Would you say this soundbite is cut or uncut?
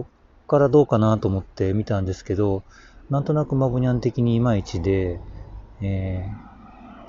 uncut